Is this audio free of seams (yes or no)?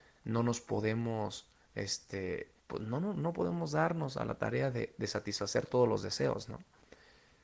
no